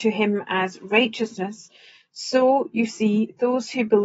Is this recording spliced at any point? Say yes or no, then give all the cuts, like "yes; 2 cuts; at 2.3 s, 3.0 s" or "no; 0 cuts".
no; 0 cuts